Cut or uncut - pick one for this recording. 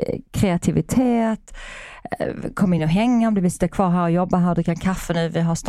uncut